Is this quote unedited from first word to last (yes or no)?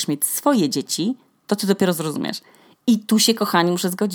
yes